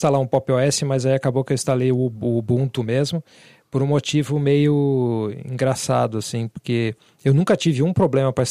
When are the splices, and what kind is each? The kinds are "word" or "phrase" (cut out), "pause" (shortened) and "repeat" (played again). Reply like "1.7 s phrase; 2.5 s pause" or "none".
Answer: none